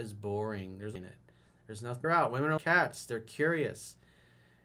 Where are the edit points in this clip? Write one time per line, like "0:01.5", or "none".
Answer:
0:01.0
0:02.0
0:02.6

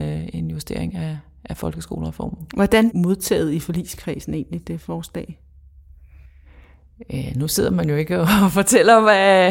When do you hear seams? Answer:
0:02.9

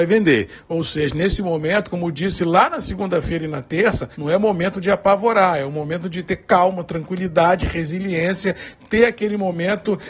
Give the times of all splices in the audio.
0:04.1

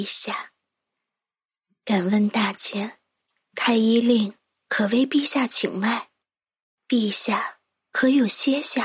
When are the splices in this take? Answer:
none

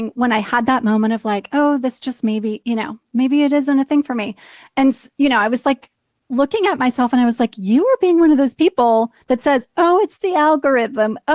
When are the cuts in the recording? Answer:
none

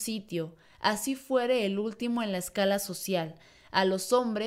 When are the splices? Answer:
none

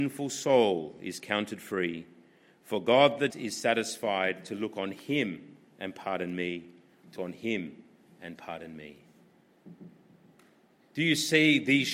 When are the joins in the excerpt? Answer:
0:03.3
0:07.2

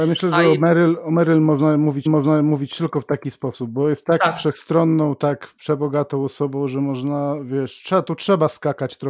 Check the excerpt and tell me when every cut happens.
0:02.1

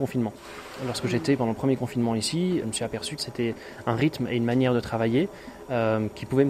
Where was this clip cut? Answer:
0:02.6
0:03.2

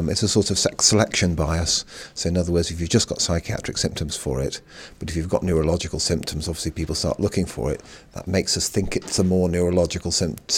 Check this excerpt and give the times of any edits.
0:04.1

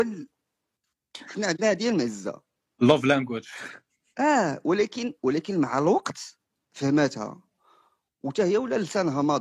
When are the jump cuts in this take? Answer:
none

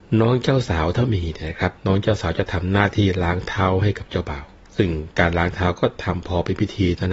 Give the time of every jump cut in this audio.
0:01.8
0:04.6

